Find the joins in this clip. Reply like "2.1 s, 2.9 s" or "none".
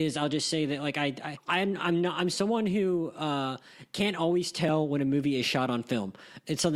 none